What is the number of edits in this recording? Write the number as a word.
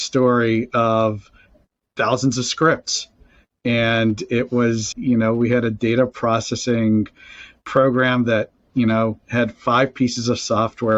two